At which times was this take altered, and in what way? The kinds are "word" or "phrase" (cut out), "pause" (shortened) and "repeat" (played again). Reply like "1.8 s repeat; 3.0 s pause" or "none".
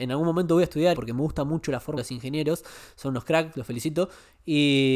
0.9 s word; 2.0 s phrase